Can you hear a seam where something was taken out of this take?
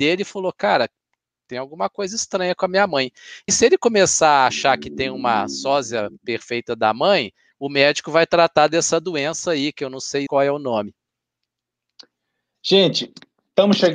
yes; 2 cuts; at 3.5 s, 10.3 s

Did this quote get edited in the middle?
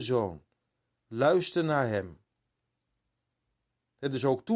no; 0 cuts

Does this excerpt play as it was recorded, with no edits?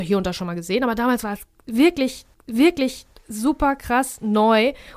no; 1 cut; at 2.3 s

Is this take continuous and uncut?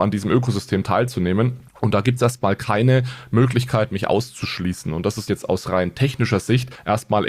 no; 1 cut; at 5.3 s

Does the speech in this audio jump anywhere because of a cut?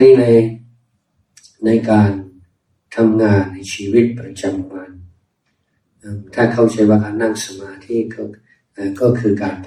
no; 0 cuts

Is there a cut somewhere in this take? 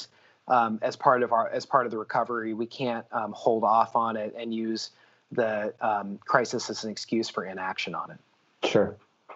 no; 0 cuts

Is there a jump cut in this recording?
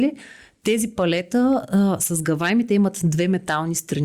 no; 0 cuts

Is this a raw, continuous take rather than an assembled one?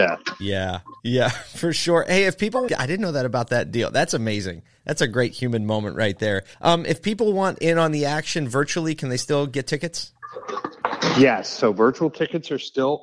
no; 3 cuts; at 1.0 s, 2.7 s, 6.5 s

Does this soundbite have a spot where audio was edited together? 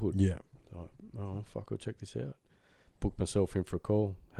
no; 0 cuts

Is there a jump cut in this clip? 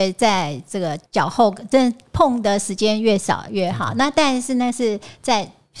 yes; 1 cut; at 1.1 s

